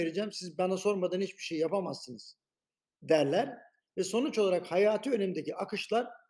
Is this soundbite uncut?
yes; 0 cuts

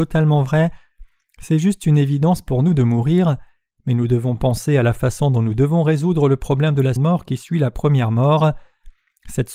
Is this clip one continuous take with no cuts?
no; 1 cut; at 7.0 s

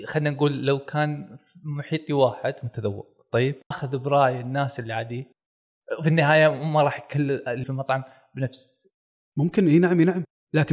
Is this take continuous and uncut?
no; 2 cuts; at 3.7 s, 7.6 s

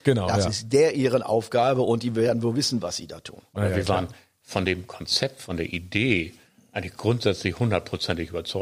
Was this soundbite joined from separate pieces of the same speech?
no; 0 cuts

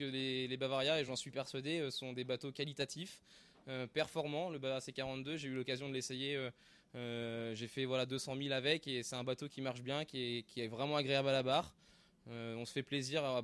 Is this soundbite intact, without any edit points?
yes; 0 cuts

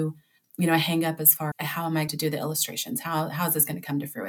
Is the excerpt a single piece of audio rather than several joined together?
no; 2 cuts; at 1.5 s, 2.1 s

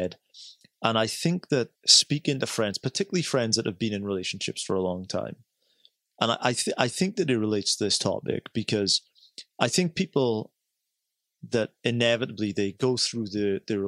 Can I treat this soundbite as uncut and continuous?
no; 1 cut; at 1.8 s

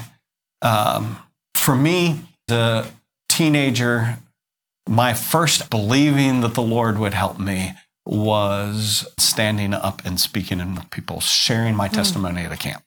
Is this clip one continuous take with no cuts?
no; 4 cuts; at 2.5 s, 5.7 s, 9.2 s, 10.8 s

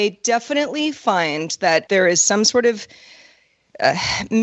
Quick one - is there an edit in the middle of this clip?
yes; 1 cut; at 1.9 s

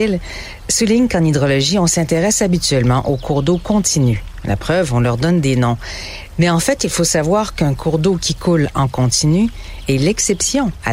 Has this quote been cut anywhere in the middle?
no; 0 cuts

